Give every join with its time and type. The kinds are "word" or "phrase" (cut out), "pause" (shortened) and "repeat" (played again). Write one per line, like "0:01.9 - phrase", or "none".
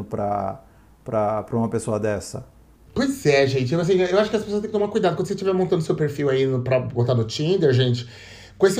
none